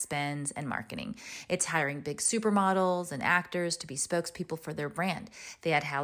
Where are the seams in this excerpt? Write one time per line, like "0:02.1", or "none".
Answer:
none

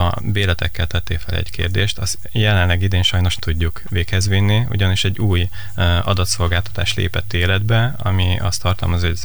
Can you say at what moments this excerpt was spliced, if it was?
0:03.4

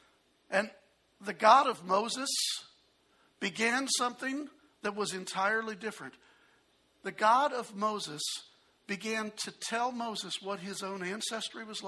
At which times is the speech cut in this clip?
none

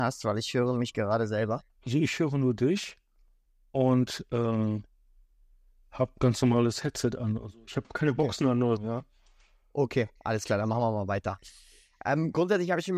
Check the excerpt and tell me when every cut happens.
0:01.7
0:07.8
0:08.8

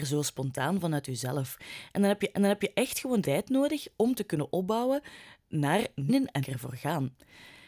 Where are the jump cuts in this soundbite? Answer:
0:02.3
0:03.2
0:06.1
0:06.4

